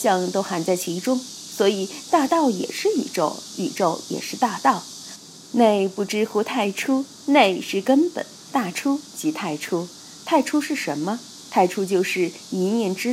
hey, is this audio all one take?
no; 1 cut; at 7.2 s

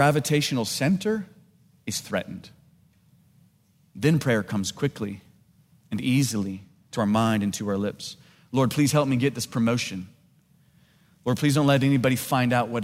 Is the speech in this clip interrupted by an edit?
no; 0 cuts

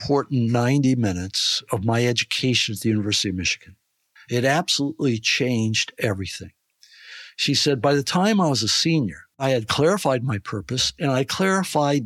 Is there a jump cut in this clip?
yes; 1 cut; at 4.2 s

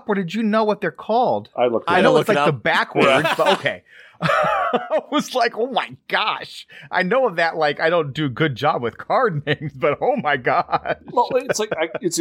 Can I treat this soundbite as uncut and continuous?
yes; 0 cuts

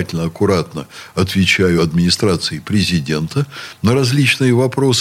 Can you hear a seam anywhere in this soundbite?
no; 0 cuts

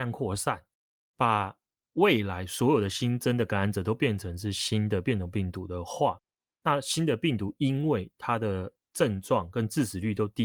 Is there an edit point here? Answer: no; 0 cuts

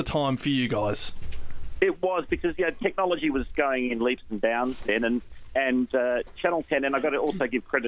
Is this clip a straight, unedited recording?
yes; 0 cuts

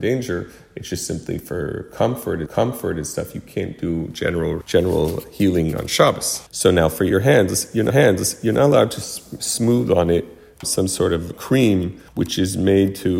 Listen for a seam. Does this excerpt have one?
yes; 7 cuts; at 2.5 s, 4.6 s, 6.5 s, 7.9 s, 10.6 s, 11.3 s, 12.1 s

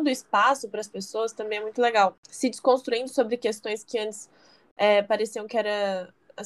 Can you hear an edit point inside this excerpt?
no; 0 cuts

